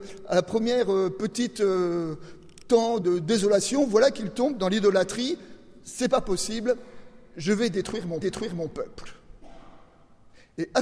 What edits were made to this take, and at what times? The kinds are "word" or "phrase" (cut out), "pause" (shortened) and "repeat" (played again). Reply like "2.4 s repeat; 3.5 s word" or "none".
3.0 s word; 8.2 s repeat